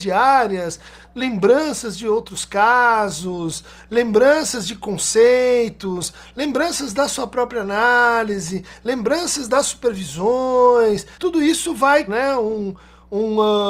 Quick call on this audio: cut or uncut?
cut